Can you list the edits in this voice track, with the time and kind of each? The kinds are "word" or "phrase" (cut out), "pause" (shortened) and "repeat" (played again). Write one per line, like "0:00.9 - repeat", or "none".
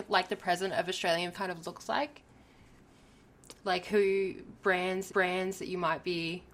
0:01.3 - word
0:05.1 - repeat